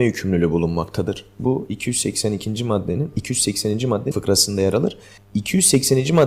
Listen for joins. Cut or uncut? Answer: cut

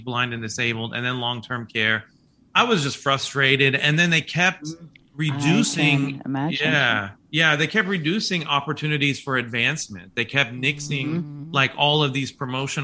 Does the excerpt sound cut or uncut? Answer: uncut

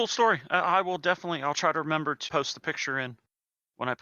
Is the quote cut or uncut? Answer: uncut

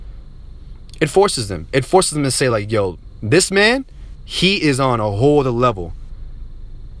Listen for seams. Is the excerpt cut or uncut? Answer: uncut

